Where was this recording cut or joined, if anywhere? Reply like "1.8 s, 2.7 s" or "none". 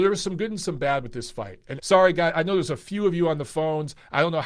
1.8 s